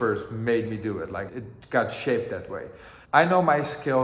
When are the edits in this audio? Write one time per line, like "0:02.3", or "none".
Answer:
0:01.3
0:03.0

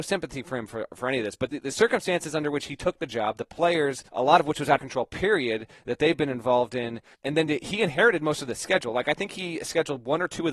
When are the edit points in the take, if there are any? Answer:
0:01.5
0:04.1
0:04.8
0:07.1

